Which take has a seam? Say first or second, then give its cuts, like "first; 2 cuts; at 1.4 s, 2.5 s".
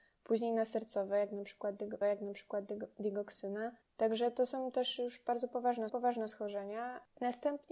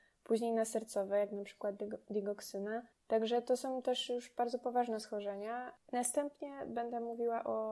first; 2 cuts; at 2.0 s, 5.9 s